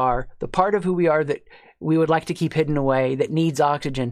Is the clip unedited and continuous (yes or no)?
yes